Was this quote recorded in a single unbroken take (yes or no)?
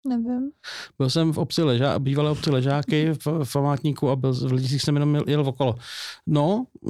yes